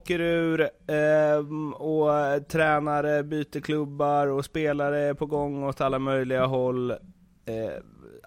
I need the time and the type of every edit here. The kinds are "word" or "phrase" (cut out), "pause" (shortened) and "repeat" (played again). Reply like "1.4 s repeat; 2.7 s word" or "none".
none